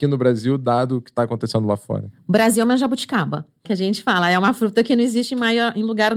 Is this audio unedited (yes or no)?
no